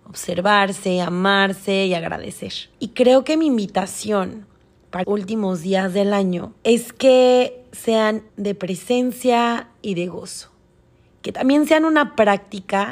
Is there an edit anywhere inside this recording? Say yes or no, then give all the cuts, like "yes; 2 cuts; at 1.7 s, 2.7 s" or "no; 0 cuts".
yes; 4 cuts; at 2.7 s, 5.0 s, 6.6 s, 8.3 s